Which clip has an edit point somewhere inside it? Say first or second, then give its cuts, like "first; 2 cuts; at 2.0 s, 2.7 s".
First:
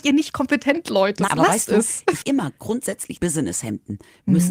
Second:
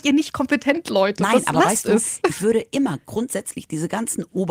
first; 3 cuts; at 1.3 s, 2.2 s, 3.2 s